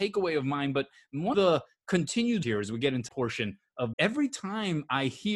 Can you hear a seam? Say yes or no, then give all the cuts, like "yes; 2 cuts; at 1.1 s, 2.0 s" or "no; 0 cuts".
yes; 4 cuts; at 1.3 s, 2.4 s, 3.1 s, 3.9 s